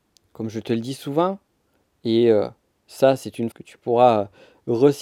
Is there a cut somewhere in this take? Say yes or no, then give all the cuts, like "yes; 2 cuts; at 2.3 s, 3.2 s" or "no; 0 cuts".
yes; 2 cuts; at 2.6 s, 3.5 s